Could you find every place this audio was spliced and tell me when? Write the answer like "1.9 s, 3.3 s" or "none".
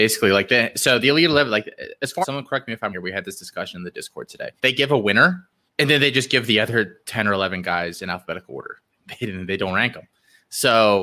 2.2 s, 2.9 s, 4.6 s, 5.7 s